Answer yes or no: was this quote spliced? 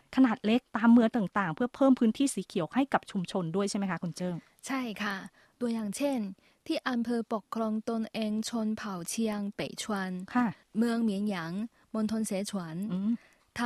no